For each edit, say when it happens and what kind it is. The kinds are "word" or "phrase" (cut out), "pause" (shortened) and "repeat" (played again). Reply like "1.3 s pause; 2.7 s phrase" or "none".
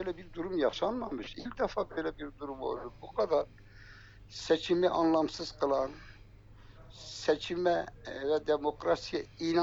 none